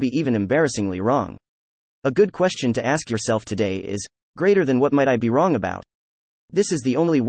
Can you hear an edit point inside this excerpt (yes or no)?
no